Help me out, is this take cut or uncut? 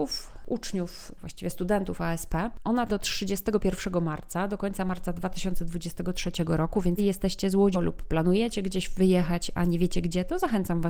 cut